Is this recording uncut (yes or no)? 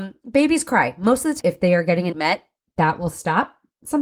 no